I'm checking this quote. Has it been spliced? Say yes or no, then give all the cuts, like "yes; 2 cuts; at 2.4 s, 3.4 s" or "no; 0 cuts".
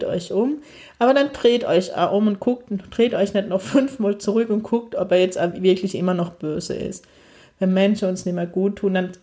no; 0 cuts